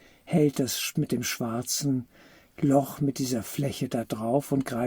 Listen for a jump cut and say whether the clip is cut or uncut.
cut